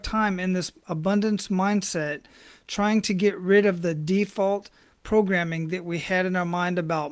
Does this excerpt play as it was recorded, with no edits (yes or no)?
yes